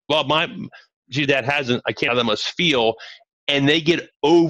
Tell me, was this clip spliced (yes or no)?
yes